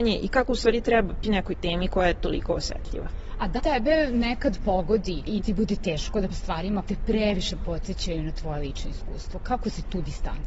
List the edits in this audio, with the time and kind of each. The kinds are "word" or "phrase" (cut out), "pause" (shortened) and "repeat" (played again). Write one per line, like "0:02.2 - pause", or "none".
0:01.2 - word
0:03.6 - word
0:05.4 - word
0:06.3 - word
0:06.8 - word

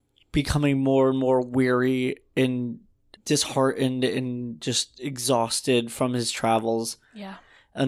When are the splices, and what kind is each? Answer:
none

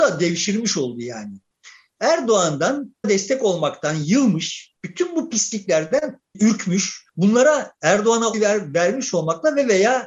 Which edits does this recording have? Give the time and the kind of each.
0:03.0 - word
0:04.8 - pause
0:07.1 - pause
0:08.3 - word

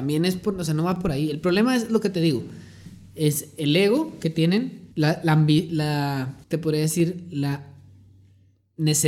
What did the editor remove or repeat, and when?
0:04.9 - pause
0:06.4 - pause

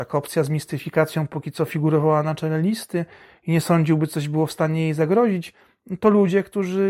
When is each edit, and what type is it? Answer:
none

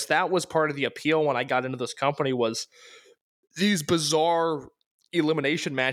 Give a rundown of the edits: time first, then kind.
none

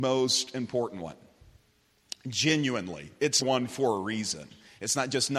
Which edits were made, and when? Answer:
0:03.4 - word

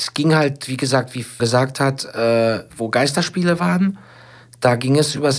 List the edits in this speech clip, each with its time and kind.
0:01.4 - phrase
0:02.7 - pause

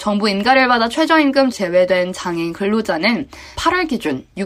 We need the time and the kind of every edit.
0:01.5 - word
0:03.5 - word

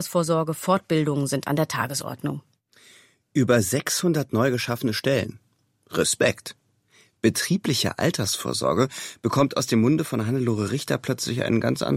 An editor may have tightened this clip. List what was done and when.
none

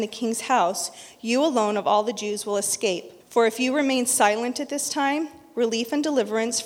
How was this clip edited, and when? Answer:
0:03.2 - pause

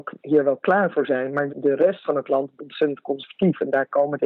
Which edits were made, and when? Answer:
0:01.5 - word
0:02.6 - word

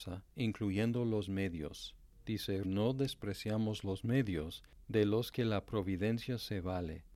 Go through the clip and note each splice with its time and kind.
0:02.6 - word

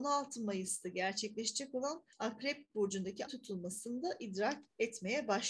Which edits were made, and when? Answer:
0:02.1 - pause
0:03.3 - word

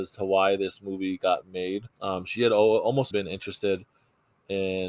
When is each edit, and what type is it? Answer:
0:01.9 - pause
0:03.1 - word

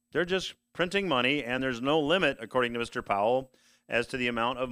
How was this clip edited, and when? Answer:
none

